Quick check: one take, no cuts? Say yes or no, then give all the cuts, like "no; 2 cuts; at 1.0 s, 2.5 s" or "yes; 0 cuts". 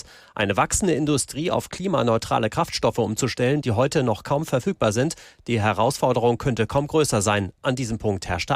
yes; 0 cuts